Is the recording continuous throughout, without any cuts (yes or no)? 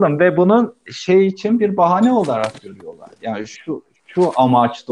yes